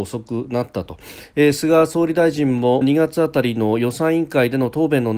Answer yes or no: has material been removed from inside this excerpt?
yes